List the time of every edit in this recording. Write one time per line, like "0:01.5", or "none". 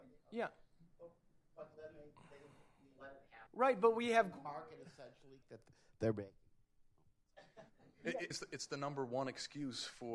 0:01.7
0:03.5
0:05.4
0:07.7
0:08.3